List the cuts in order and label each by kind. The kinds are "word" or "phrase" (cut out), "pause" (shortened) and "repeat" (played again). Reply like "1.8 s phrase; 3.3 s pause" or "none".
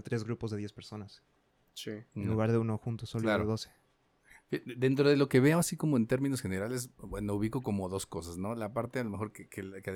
none